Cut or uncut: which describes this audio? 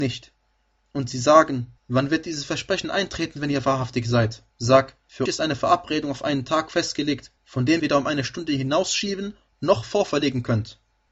cut